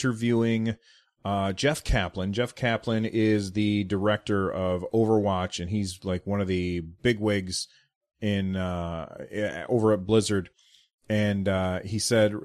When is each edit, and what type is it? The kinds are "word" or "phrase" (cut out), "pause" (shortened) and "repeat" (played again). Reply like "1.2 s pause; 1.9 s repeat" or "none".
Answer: none